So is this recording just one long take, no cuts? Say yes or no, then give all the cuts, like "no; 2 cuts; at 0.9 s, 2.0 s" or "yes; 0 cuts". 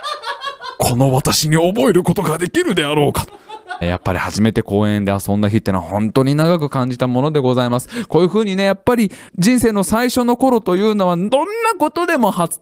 no; 2 cuts; at 3.8 s, 9.3 s